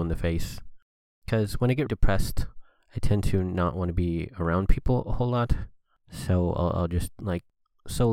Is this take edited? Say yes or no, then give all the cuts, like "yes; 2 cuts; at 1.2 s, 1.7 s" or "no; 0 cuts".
yes; 1 cut; at 1.9 s